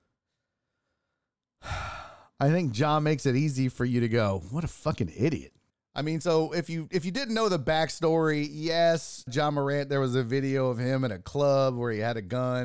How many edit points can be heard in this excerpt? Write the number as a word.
two